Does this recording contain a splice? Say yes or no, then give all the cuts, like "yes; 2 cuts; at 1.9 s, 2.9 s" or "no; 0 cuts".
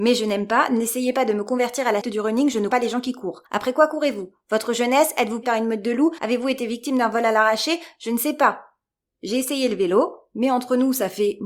yes; 3 cuts; at 2.0 s, 2.7 s, 5.4 s